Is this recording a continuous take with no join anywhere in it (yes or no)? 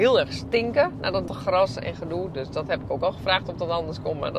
no